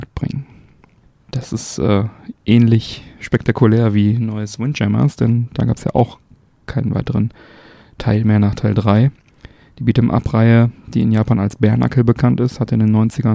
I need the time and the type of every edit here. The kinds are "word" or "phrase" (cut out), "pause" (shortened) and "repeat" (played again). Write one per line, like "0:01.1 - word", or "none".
none